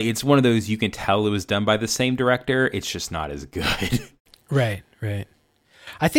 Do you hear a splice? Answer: no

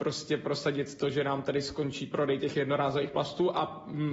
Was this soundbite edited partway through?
no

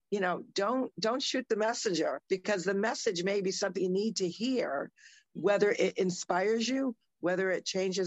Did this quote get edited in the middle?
yes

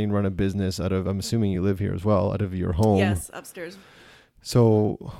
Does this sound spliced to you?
no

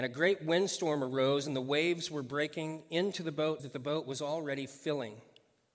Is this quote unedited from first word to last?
no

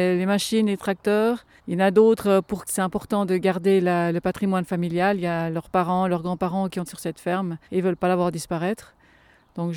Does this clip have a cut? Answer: yes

